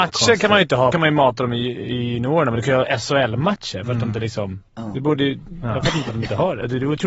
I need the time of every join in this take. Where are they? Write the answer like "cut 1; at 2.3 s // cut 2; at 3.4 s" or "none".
cut 1; at 0.9 s // cut 2; at 4.7 s